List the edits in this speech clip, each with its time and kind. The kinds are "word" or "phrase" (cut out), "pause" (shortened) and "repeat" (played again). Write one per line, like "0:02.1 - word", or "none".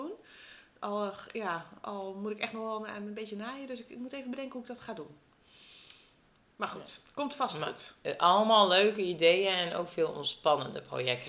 none